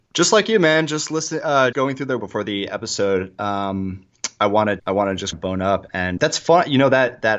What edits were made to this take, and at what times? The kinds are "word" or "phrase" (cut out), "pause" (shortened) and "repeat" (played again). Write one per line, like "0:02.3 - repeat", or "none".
0:01.7 - word
0:02.2 - word
0:04.8 - word
0:05.3 - word
0:06.2 - word